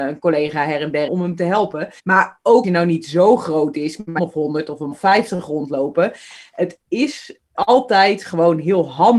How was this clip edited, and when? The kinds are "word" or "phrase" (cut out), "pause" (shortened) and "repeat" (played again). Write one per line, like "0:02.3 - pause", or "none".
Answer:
0:01.1 - phrase
0:02.0 - pause
0:02.6 - phrase
0:04.2 - phrase
0:04.9 - word
0:07.5 - word